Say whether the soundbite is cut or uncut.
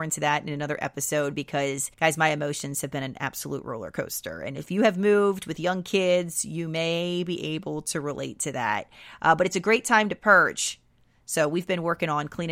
cut